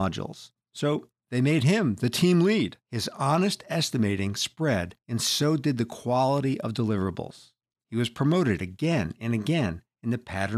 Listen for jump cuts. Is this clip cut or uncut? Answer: cut